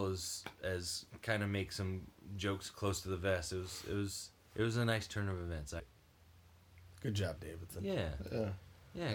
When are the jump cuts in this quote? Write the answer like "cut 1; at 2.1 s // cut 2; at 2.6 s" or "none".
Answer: cut 1; at 4.4 s // cut 2; at 5.8 s // cut 3; at 7.4 s